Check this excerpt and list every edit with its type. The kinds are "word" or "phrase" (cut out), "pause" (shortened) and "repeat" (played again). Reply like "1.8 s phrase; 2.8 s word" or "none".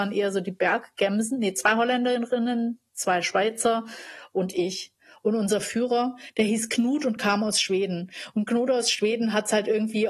none